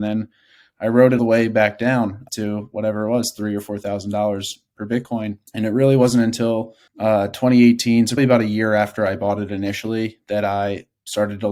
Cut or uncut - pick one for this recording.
cut